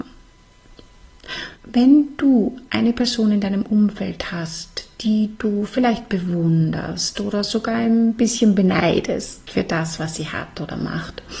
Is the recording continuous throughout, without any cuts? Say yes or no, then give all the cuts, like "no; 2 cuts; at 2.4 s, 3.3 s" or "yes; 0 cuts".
no; 1 cut; at 1.5 s